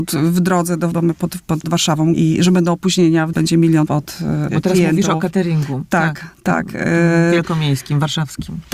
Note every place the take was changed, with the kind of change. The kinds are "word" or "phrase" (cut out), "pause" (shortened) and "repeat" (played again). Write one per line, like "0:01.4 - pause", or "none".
0:00.9 - word
0:01.6 - word
0:02.1 - word
0:03.3 - word
0:03.9 - word
0:04.5 - word